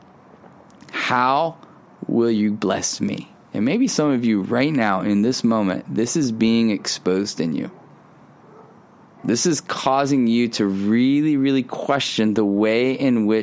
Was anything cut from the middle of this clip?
no; 0 cuts

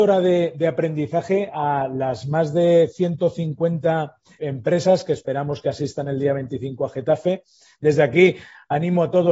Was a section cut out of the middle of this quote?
yes; 1 cut; at 4.4 s

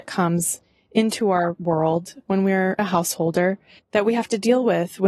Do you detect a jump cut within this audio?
yes; 1 cut; at 3.8 s

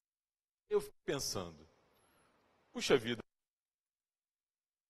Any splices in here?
no; 0 cuts

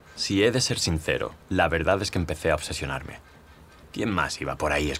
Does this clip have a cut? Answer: yes; 1 cut; at 1.4 s

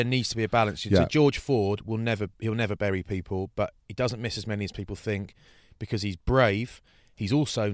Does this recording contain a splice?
no; 0 cuts

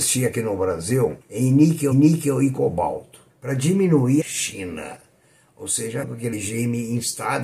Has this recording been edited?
yes; 6 cuts; at 1.2 s, 1.9 s, 3.3 s, 4.2 s, 6.0 s, 6.3 s

